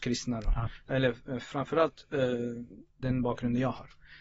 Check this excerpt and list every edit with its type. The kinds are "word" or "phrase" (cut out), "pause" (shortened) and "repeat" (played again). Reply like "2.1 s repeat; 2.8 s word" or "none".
3.0 s word

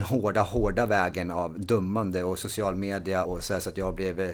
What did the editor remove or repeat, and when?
3.3 s word

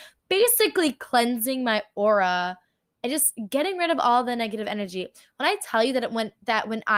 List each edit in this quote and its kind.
none

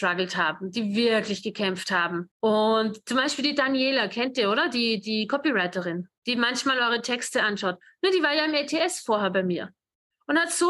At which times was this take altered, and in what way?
2.3 s pause; 6.2 s pause

